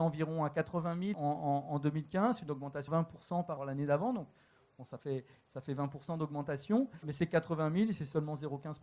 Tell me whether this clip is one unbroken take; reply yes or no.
no